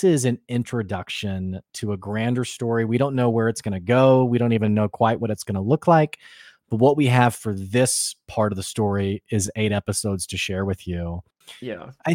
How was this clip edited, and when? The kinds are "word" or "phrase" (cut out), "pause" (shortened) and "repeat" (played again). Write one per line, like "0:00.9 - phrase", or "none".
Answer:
none